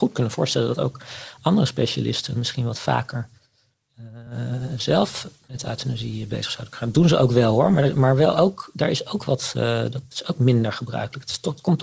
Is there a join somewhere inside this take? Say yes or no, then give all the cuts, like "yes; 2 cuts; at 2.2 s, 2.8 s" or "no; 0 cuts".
no; 0 cuts